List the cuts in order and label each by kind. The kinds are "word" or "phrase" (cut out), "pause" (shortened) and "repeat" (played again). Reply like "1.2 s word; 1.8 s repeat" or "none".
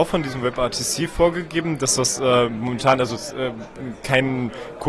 none